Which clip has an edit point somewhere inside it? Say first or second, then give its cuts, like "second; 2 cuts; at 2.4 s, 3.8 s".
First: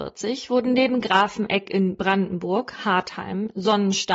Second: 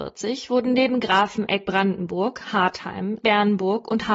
second; 2 cuts; at 1.6 s, 3.2 s